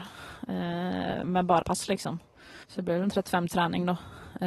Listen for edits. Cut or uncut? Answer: cut